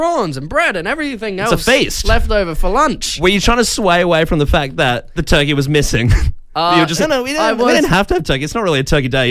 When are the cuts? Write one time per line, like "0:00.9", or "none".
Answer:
0:07.0